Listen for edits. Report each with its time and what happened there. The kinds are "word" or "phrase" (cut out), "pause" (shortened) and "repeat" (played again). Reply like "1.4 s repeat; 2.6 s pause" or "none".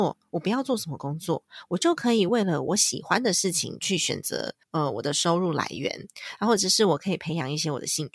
4.6 s pause